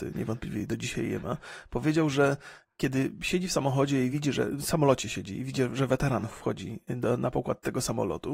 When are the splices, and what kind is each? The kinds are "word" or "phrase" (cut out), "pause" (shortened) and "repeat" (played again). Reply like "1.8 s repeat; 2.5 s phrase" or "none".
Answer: none